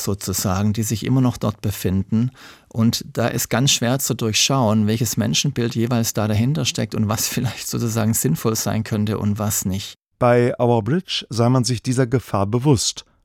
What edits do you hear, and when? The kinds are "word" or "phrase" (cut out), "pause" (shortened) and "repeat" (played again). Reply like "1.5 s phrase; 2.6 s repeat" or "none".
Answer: none